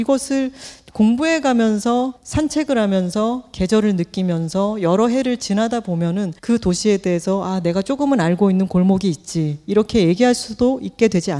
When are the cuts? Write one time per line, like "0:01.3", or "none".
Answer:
0:02.2
0:06.4